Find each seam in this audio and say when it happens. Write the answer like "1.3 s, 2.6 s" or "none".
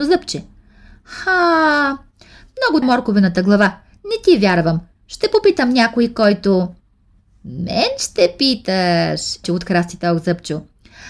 2.8 s, 9.4 s